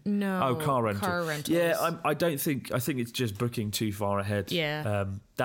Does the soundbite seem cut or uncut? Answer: uncut